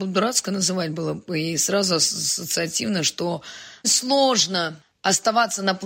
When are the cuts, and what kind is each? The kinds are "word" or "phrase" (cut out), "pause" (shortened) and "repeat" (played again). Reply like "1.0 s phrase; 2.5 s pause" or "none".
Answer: 3.8 s word